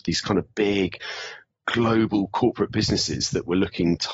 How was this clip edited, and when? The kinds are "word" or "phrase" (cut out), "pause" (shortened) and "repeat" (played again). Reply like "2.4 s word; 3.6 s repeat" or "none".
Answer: none